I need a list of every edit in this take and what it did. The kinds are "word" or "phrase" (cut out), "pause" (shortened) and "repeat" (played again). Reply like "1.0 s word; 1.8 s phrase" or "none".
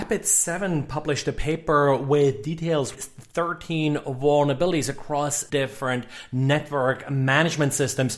2.9 s word; 5.5 s word